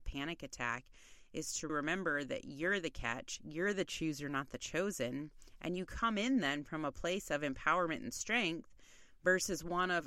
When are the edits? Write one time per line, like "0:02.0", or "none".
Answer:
0:01.7